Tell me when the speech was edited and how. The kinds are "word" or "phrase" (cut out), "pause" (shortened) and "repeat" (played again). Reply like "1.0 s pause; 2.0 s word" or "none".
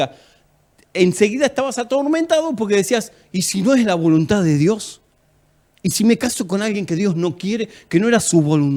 none

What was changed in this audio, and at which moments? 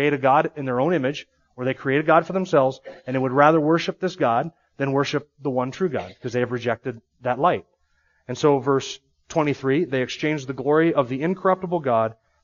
none

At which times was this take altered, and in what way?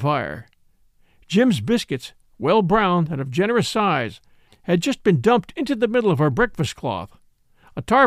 none

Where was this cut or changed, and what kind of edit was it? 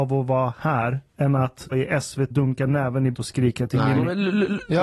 1.1 s pause; 1.7 s word; 2.3 s word; 3.1 s word

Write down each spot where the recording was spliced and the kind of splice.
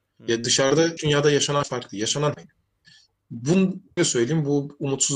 1.0 s word; 1.6 s word; 2.3 s word; 4.0 s word

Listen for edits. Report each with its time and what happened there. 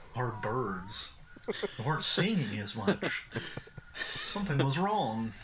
none

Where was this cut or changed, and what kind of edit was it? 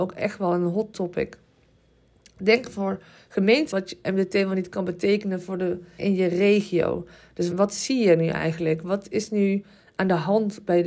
3.7 s word; 6.0 s word; 7.5 s word

